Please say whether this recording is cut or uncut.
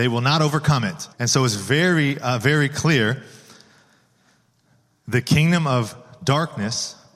cut